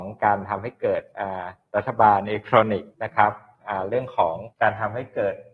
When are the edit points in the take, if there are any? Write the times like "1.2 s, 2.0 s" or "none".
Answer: 2.9 s, 4.5 s